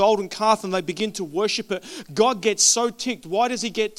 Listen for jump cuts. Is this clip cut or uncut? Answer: uncut